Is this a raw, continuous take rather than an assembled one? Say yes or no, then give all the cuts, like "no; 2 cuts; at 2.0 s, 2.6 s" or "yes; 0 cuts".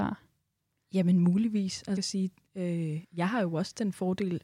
no; 2 cuts; at 2.0 s, 3.0 s